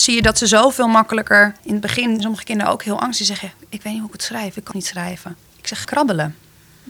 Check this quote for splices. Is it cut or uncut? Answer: cut